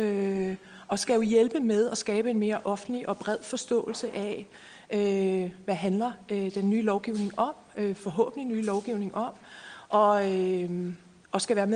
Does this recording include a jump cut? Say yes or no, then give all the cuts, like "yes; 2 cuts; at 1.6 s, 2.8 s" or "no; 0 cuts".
no; 0 cuts